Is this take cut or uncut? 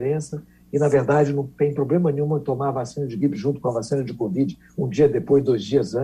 uncut